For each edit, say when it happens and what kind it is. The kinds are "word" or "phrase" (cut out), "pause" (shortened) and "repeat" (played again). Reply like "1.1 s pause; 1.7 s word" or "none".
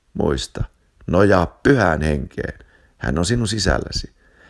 none